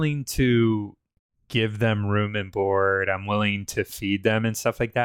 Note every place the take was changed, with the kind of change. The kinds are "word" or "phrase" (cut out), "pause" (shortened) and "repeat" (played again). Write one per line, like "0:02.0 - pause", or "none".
none